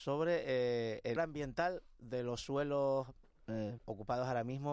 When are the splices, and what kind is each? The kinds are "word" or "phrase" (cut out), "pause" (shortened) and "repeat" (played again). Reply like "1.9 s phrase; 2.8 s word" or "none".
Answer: 1.2 s word; 3.8 s word